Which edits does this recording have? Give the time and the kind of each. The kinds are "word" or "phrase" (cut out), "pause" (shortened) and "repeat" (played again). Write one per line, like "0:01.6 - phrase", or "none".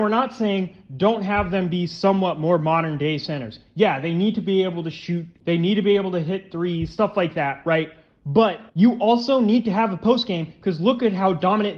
0:08.7 - pause